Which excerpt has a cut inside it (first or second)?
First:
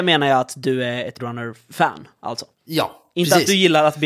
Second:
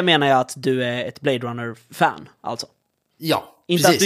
first